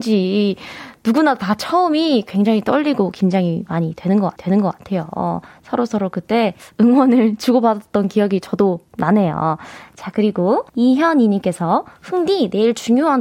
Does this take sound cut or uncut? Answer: cut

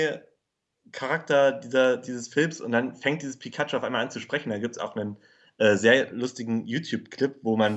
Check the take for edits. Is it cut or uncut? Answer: uncut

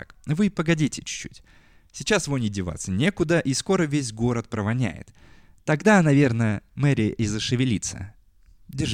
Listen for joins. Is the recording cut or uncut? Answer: uncut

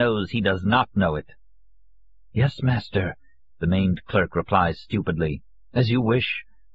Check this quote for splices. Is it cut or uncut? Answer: uncut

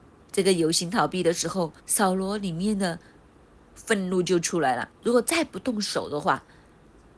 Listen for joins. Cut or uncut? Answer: cut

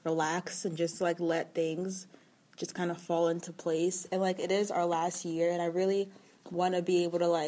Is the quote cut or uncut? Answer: uncut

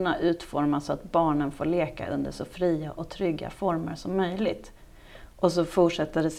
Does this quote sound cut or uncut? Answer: uncut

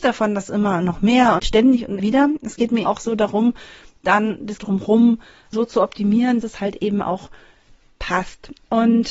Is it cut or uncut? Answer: cut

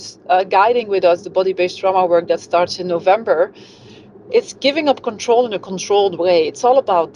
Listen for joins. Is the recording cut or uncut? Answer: uncut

